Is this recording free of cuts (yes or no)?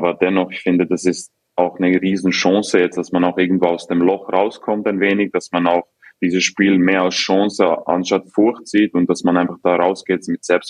yes